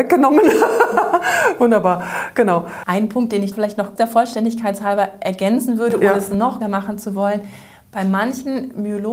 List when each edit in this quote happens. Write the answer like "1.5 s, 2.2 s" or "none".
3.5 s, 4.0 s, 6.6 s